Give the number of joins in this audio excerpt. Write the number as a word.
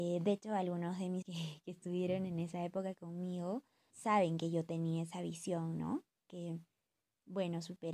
two